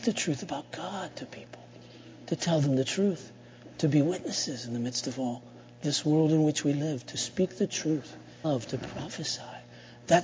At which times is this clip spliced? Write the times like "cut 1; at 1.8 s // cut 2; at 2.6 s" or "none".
cut 1; at 8.4 s